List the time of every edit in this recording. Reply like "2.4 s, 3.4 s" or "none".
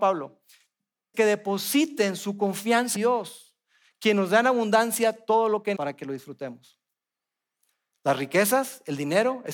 1.1 s, 2.9 s, 5.7 s